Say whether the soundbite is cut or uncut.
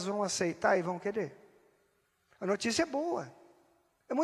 uncut